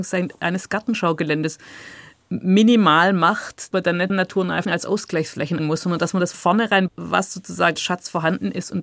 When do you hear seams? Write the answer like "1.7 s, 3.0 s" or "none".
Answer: 3.7 s, 4.1 s, 4.6 s, 5.6 s, 6.3 s, 6.9 s, 7.8 s